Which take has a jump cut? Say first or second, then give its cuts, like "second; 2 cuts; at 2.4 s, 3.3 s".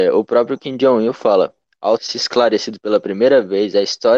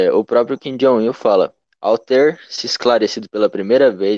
first; 1 cut; at 2.0 s